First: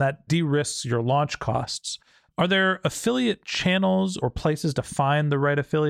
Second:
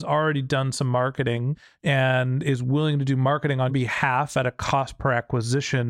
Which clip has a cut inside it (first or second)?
second